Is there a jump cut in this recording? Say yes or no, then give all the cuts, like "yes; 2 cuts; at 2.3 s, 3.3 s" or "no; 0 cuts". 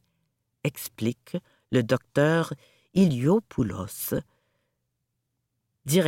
no; 0 cuts